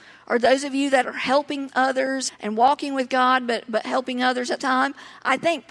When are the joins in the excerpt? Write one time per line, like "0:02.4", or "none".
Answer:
0:01.0
0:02.3
0:04.6